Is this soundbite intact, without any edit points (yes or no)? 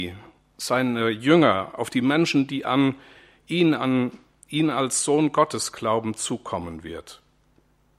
yes